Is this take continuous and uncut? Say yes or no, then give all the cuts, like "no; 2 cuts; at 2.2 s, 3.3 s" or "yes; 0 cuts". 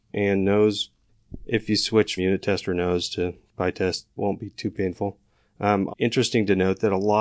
no; 3 cuts; at 2.2 s, 4.2 s, 5.9 s